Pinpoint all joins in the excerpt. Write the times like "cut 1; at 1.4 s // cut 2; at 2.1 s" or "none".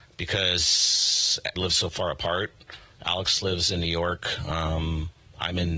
cut 1; at 1.6 s